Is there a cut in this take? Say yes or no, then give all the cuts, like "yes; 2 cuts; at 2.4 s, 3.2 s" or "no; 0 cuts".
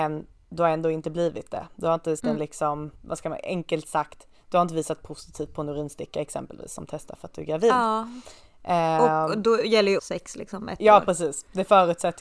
yes; 3 cuts; at 2.2 s, 2.9 s, 10.0 s